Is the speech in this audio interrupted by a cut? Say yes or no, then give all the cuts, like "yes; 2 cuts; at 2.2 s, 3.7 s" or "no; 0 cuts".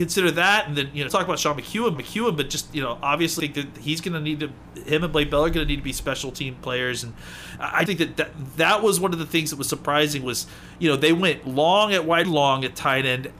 yes; 5 cuts; at 1.1 s, 2.0 s, 3.4 s, 7.9 s, 12.2 s